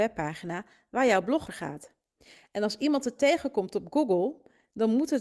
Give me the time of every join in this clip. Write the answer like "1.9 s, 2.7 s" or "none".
1.5 s